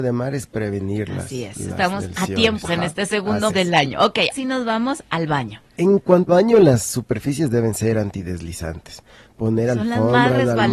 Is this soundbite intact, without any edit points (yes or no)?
no